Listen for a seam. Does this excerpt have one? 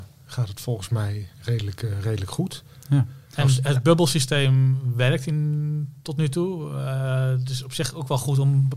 yes; 2 cuts; at 1.3 s, 3.2 s

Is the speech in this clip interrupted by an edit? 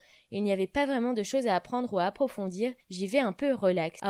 yes; 1 cut; at 2.8 s

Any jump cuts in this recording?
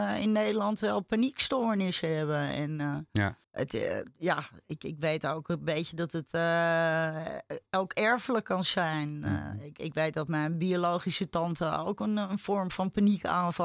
yes; 2 cuts; at 3.4 s, 4.6 s

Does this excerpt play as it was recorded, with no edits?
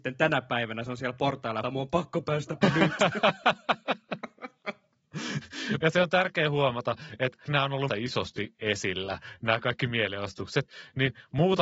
no; 5 cuts; at 1.6 s, 2.6 s, 5.8 s, 7.4 s, 7.9 s

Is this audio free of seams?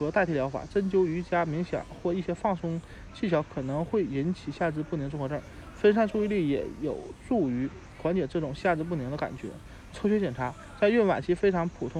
yes; 0 cuts

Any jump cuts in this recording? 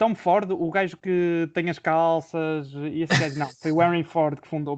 no; 0 cuts

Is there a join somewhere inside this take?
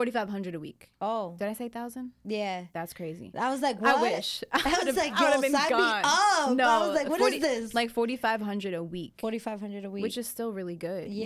no; 0 cuts

